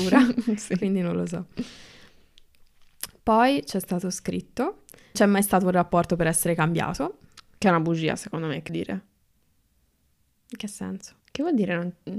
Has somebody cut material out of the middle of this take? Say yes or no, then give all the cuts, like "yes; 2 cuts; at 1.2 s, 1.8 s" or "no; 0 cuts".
yes; 3 cuts; at 5.1 s, 8.7 s, 11.2 s